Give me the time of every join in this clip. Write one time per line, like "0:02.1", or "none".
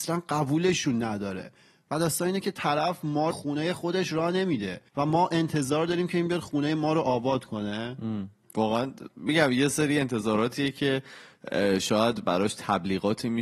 0:03.3
0:04.9